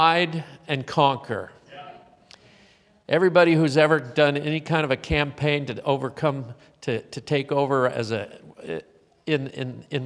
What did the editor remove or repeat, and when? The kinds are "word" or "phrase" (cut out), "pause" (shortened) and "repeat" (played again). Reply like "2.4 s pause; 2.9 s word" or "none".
none